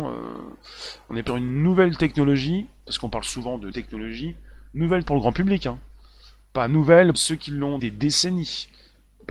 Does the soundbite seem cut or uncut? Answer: cut